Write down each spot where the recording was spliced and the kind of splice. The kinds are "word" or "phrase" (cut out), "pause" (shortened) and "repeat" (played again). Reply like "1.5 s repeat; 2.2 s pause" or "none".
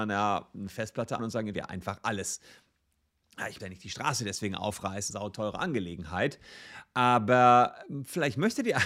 1.2 s word; 1.5 s word; 3.6 s word; 5.1 s phrase